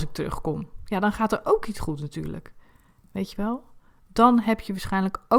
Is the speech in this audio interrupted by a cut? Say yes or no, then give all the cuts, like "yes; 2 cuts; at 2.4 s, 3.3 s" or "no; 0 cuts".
yes; 1 cut; at 1.7 s